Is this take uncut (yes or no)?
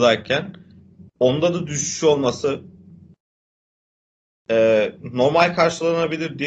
yes